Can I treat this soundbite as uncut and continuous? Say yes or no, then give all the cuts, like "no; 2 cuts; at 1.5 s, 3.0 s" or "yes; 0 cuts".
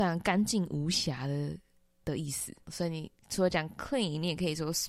yes; 0 cuts